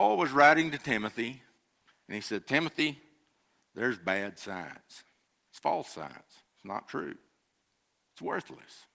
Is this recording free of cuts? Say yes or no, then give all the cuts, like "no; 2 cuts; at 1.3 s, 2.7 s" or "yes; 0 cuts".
yes; 0 cuts